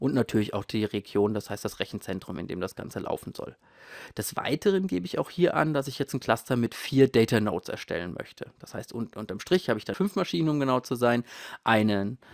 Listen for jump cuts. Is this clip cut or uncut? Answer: uncut